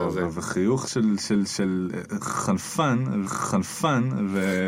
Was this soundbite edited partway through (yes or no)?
yes